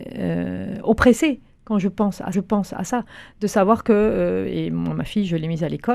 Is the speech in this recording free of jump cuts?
no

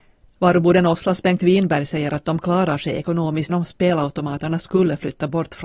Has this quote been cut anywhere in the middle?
yes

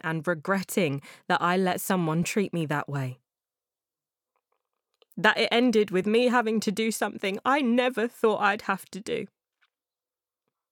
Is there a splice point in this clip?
no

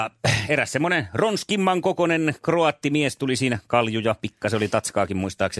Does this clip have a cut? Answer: no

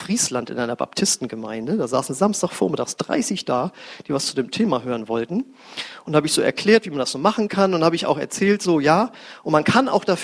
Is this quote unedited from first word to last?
yes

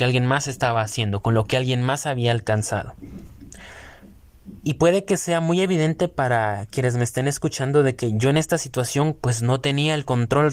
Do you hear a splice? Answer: yes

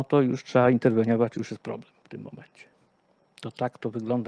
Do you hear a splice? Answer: no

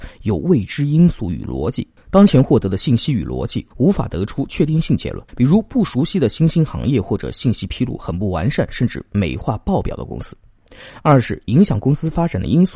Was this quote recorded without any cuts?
no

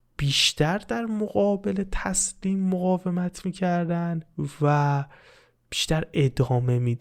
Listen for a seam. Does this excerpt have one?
no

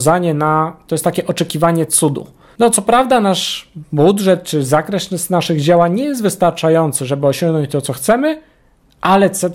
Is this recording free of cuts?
yes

